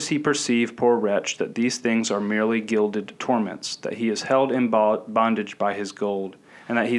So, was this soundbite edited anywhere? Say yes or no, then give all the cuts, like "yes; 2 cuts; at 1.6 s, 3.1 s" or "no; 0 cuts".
no; 0 cuts